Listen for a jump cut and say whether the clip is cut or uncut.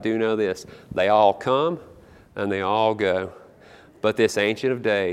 uncut